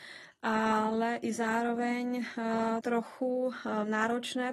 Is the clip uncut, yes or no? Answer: no